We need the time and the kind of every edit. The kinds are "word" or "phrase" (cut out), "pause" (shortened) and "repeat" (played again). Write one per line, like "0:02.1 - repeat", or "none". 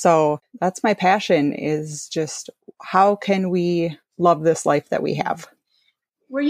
none

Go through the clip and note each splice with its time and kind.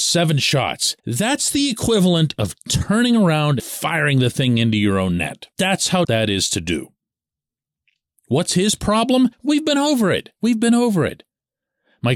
0:01.0 - pause
0:03.6 - word
0:05.5 - pause
0:06.0 - word
0:09.3 - pause
0:10.4 - pause

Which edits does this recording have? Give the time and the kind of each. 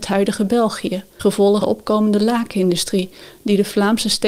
0:01.2 - word
0:01.6 - word

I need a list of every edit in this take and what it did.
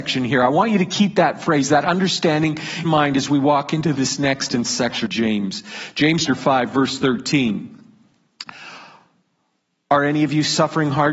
0:02.8 - word
0:04.6 - word
0:05.1 - word
0:06.3 - word

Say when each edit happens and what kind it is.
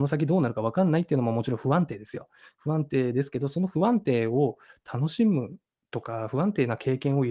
none

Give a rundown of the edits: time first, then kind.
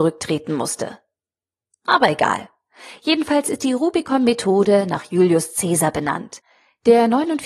none

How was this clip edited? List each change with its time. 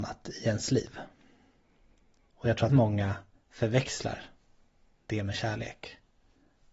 0:02.7 - word

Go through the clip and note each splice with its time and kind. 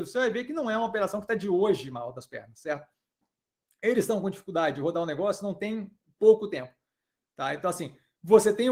none

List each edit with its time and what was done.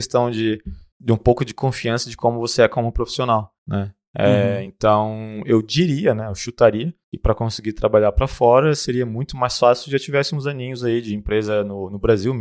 none

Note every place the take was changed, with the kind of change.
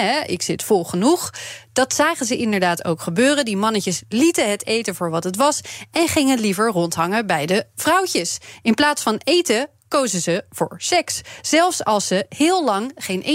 none

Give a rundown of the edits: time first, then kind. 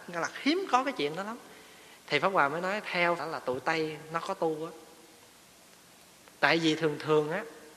0:03.2 - word

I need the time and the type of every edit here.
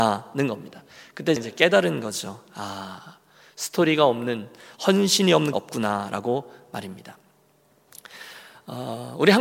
0:01.4 - word
0:05.5 - phrase

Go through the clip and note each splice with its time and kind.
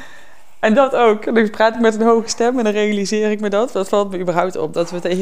none

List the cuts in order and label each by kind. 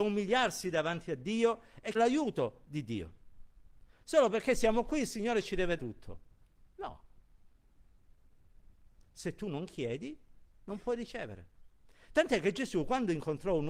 0:01.9 - word
0:05.8 - word

